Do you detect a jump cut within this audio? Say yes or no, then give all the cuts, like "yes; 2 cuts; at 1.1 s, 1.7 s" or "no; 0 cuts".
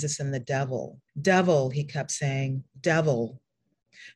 yes; 1 cut; at 1.1 s